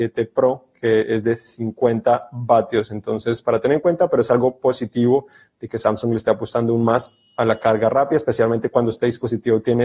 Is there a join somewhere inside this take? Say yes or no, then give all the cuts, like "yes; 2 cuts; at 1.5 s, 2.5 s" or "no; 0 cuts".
no; 0 cuts